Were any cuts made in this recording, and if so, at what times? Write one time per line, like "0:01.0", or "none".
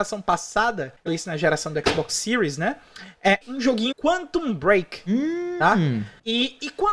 0:01.1
0:03.4
0:03.9